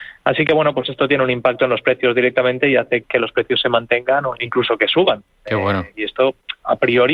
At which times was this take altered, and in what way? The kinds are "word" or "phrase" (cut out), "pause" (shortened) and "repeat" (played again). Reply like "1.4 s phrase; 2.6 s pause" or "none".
3.0 s word; 4.4 s word